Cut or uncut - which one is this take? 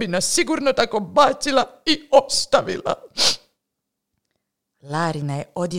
uncut